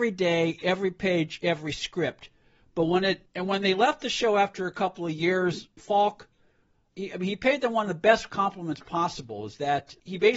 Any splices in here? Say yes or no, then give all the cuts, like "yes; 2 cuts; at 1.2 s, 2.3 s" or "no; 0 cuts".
no; 0 cuts